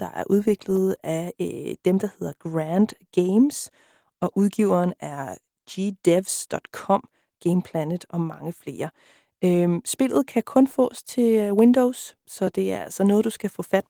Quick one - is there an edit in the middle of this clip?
no; 0 cuts

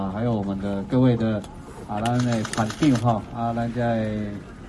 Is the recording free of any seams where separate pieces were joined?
yes; 0 cuts

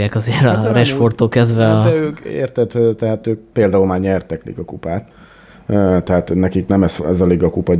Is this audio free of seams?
yes; 0 cuts

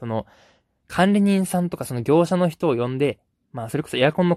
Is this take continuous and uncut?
yes; 0 cuts

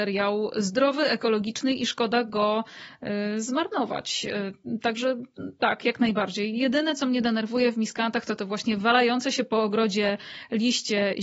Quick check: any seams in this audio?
no; 0 cuts

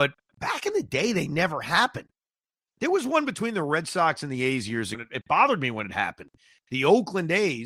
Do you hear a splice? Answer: yes; 1 cut; at 4.9 s

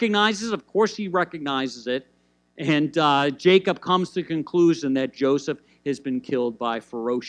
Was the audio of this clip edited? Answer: no; 0 cuts

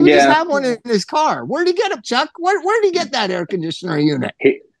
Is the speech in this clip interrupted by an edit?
yes; 1 cut; at 2.0 s

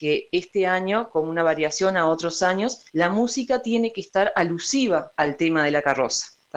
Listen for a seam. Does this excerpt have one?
yes; 1 cut; at 2.9 s

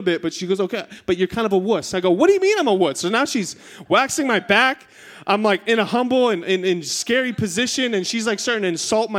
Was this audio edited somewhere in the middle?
no; 0 cuts

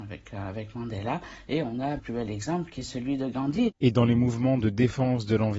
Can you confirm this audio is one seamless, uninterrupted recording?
no; 1 cut; at 2.0 s

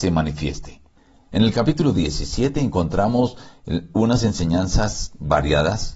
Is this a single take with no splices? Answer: yes; 0 cuts

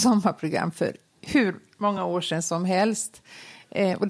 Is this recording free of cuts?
yes; 0 cuts

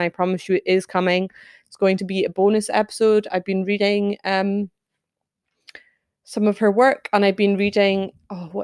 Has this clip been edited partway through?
no; 0 cuts

